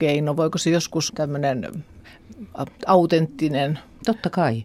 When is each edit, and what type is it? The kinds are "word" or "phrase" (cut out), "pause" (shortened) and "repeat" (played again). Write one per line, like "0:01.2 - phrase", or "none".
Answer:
0:01.1 - word